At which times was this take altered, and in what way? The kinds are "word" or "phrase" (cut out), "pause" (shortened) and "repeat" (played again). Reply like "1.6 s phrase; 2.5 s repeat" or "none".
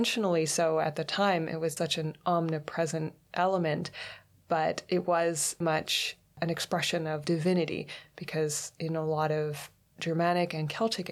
1.8 s word; 5.6 s word